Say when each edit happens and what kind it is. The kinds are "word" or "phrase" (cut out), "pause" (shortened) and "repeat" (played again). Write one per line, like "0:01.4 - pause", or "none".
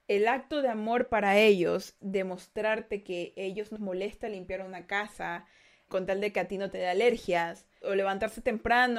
0:02.0 - word
0:03.8 - word
0:05.9 - word
0:07.8 - word